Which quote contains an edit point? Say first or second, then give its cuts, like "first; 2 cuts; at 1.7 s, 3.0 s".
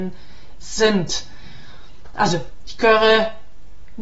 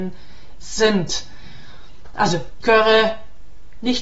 second; 1 cut; at 2.6 s